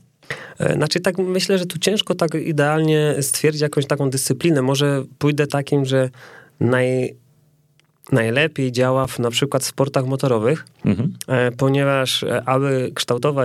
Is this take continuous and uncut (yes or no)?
no